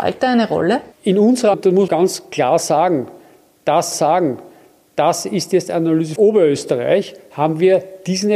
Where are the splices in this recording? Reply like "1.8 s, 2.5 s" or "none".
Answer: 0.9 s, 1.5 s, 1.9 s, 3.9 s, 6.2 s